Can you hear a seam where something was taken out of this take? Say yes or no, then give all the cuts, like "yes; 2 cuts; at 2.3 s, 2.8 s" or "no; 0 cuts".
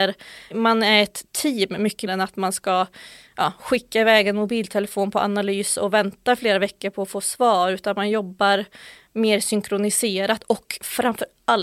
yes; 1 cut; at 2.1 s